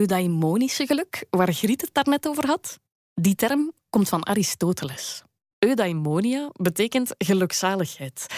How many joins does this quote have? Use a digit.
1